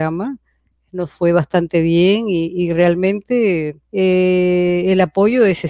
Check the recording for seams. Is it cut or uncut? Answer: cut